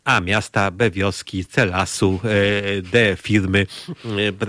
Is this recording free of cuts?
yes; 0 cuts

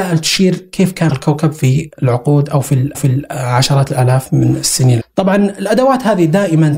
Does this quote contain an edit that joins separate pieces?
yes; 3 cuts; at 1.1 s, 2.9 s, 5.0 s

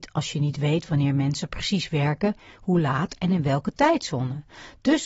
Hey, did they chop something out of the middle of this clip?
no; 0 cuts

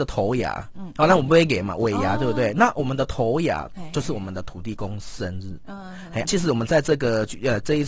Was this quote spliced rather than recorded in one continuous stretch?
yes; 1 cut; at 6.2 s

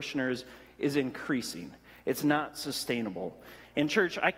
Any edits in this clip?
no; 0 cuts

